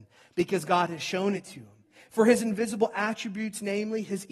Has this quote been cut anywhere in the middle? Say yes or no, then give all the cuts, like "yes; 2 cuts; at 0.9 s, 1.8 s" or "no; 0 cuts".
no; 0 cuts